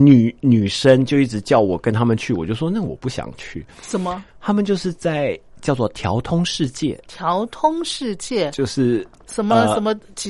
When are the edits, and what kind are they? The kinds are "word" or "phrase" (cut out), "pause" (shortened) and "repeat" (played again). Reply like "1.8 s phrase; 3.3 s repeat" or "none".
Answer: 4.3 s pause; 5.5 s pause; 7.0 s pause